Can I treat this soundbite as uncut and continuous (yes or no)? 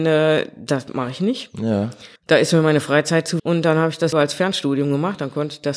no